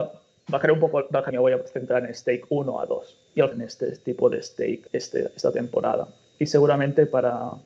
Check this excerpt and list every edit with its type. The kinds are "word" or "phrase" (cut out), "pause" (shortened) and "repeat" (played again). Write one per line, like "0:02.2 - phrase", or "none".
0:01.3 - phrase
0:03.5 - phrase
0:04.9 - pause